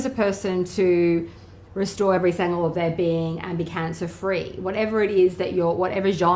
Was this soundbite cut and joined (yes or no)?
no